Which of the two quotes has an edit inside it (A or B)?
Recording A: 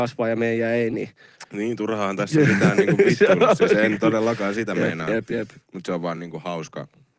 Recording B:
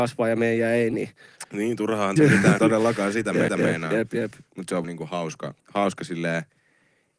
B